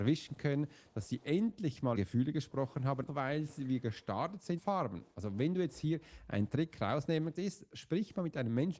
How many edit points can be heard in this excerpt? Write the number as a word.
four